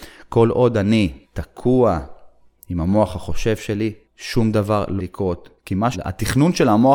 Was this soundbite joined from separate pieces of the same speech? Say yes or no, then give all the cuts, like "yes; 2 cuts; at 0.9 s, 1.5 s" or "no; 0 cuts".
yes; 5 cuts; at 1.2 s, 4.0 s, 5.0 s, 5.6 s, 5.9 s